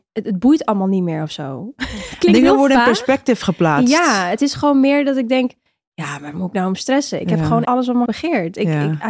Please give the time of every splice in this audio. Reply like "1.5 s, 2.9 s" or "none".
6.3 s, 7.6 s, 8.1 s